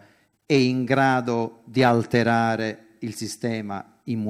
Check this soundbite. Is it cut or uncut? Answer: uncut